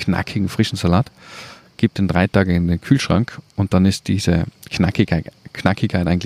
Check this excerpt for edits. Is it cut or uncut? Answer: uncut